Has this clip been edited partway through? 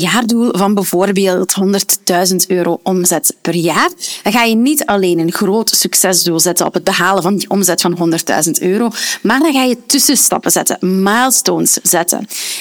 no; 0 cuts

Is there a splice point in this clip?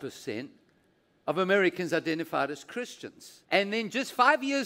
yes; 1 cut; at 3.4 s

